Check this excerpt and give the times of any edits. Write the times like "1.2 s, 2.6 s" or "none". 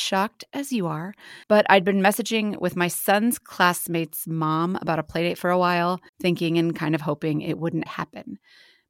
1.4 s, 6.1 s, 7.9 s